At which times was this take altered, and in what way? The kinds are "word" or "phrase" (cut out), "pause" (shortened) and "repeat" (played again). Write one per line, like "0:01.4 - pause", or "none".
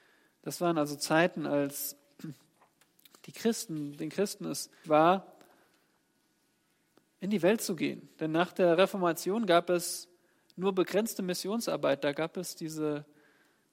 0:04.8 - word